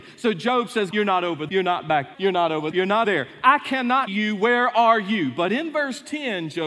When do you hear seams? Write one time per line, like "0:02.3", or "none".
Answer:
0:00.9
0:01.5
0:02.1
0:02.7
0:03.0
0:04.1